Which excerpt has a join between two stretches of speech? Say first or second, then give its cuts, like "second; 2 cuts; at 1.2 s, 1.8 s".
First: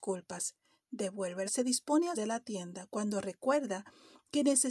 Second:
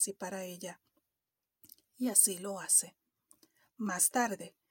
first; 2 cuts; at 1.5 s, 2.1 s